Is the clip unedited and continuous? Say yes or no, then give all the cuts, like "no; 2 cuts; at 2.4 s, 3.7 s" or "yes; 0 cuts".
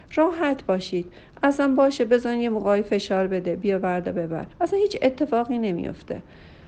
no; 1 cut; at 4.5 s